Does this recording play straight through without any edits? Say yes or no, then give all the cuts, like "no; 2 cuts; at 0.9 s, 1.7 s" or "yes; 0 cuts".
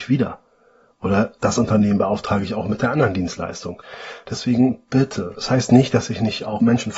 yes; 0 cuts